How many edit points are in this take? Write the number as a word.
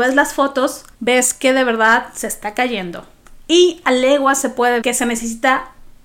two